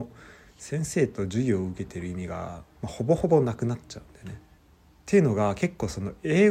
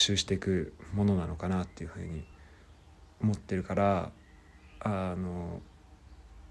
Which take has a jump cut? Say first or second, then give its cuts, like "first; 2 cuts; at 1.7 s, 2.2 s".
first; 2 cuts; at 2.7 s, 4.6 s